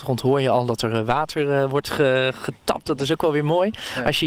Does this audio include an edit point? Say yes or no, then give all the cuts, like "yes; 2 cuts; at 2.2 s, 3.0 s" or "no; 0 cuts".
no; 0 cuts